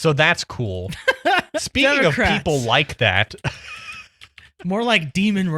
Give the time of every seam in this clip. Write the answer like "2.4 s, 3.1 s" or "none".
1.6 s